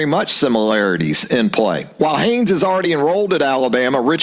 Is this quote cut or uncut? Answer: uncut